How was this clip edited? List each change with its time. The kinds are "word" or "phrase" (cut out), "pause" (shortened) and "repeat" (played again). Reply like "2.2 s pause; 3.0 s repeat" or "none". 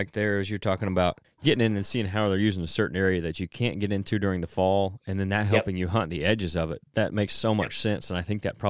1.2 s pause